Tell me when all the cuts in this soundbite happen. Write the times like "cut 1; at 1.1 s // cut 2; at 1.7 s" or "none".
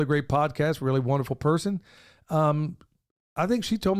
none